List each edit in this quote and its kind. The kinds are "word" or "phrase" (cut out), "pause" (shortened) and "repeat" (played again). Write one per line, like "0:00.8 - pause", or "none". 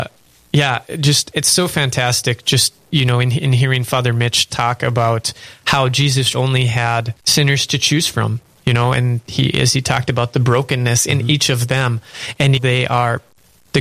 0:06.3 - word
0:07.2 - pause
0:12.6 - phrase